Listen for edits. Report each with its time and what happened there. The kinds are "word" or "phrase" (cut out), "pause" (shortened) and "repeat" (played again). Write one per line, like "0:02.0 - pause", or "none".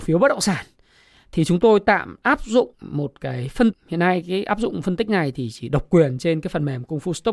0:02.7 - pause
0:03.7 - word